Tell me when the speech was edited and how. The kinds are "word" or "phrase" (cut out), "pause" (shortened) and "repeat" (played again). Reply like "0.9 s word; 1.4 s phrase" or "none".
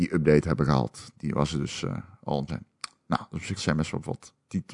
2.5 s phrase; 3.6 s phrase

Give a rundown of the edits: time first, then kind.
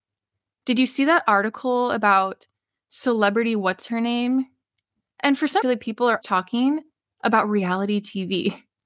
5.6 s phrase; 6.2 s word

